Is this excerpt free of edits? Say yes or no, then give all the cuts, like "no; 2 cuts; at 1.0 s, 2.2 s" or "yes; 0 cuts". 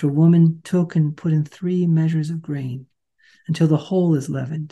yes; 0 cuts